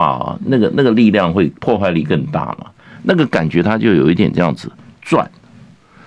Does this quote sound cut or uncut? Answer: uncut